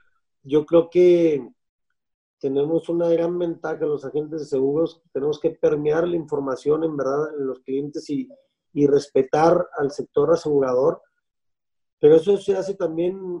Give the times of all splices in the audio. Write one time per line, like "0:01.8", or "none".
none